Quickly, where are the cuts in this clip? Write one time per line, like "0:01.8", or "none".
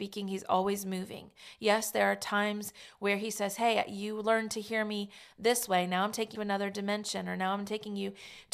0:06.3